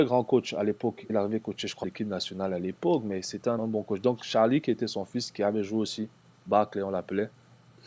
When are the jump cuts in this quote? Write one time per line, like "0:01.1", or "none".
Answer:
0:01.1
0:01.8
0:03.6